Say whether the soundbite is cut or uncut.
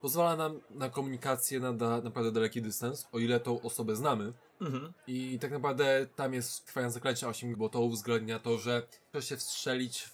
cut